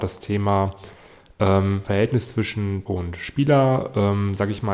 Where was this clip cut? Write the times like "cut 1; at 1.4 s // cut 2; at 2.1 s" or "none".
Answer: cut 1; at 1.8 s // cut 2; at 2.9 s